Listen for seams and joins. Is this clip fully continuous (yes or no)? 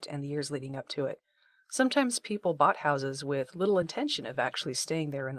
yes